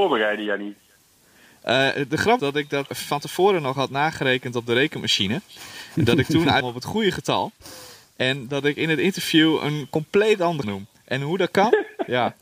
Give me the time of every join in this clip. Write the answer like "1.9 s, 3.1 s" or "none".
2.4 s, 2.9 s, 6.6 s, 10.6 s